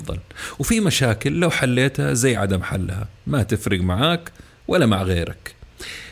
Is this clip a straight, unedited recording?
yes; 0 cuts

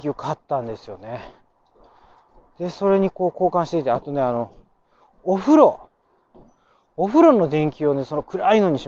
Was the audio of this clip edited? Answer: no; 0 cuts

